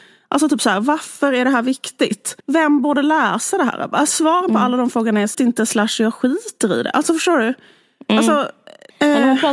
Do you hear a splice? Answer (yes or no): yes